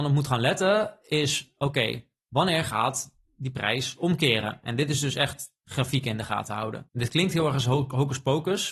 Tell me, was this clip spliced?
yes; 1 cut; at 6.9 s

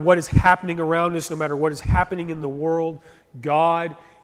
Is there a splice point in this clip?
no; 0 cuts

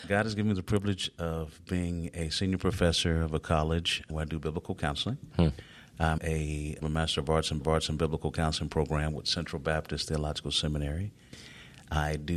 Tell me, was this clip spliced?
yes; 3 cuts; at 6.2 s, 6.8 s, 7.6 s

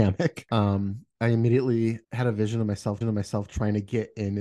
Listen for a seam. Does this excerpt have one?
yes; 2 cuts; at 2.0 s, 3.0 s

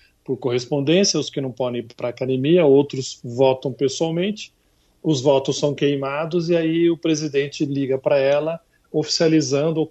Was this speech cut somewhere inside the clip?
no; 0 cuts

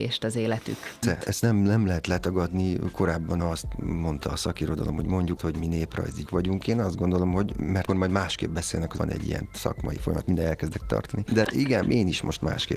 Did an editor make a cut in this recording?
yes; 9 cuts; at 1.0 s, 3.4 s, 5.4 s, 6.3 s, 7.9 s, 9.0 s, 10.8 s, 11.4 s, 11.8 s

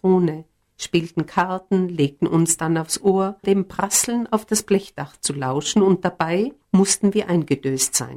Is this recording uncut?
no; 2 cuts; at 3.4 s, 6.6 s

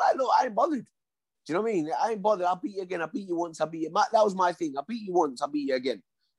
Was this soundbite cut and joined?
no; 0 cuts

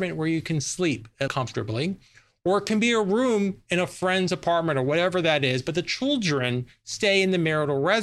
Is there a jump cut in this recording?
yes; 1 cut; at 1.3 s

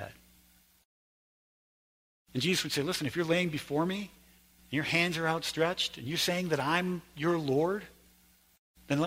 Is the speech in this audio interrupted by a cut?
no; 0 cuts

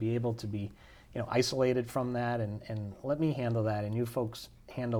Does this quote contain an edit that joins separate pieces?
no; 0 cuts

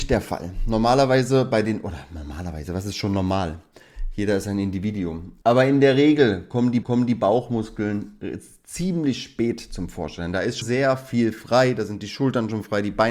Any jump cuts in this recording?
yes; 3 cuts; at 5.4 s, 6.8 s, 10.6 s

